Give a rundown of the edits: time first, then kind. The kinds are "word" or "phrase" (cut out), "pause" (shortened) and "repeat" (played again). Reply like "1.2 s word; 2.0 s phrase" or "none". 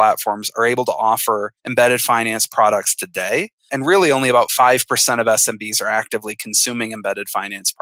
1.6 s pause